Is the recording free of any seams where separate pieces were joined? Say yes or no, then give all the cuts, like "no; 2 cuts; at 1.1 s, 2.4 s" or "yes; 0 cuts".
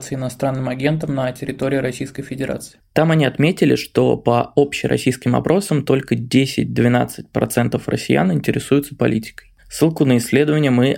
no; 1 cut; at 9.6 s